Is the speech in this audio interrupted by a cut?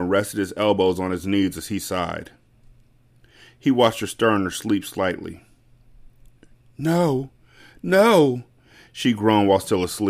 no; 0 cuts

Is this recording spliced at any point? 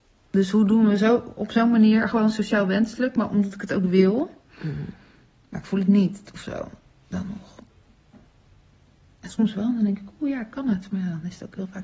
no; 0 cuts

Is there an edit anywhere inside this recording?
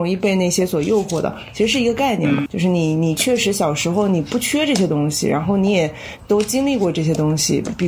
yes; 1 cut; at 2.5 s

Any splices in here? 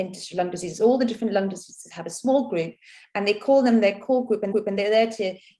yes; 1 cut; at 4.5 s

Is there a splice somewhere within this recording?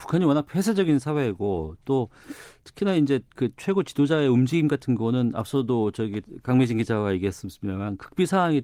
no; 0 cuts

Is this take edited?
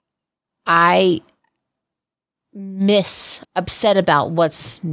yes; 1 cut; at 3.4 s

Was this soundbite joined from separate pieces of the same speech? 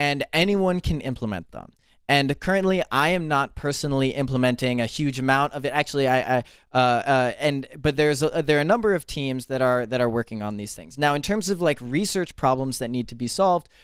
no; 0 cuts

